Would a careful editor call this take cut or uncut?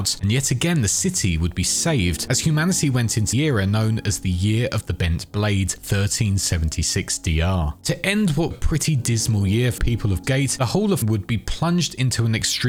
cut